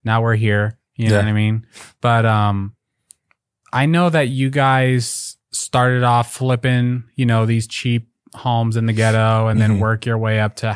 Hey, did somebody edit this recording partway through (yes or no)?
no